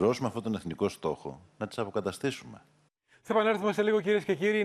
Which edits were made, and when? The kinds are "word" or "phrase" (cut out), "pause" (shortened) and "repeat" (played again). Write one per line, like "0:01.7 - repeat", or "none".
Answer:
0:02.9 - pause